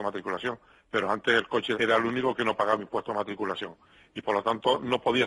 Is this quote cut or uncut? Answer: cut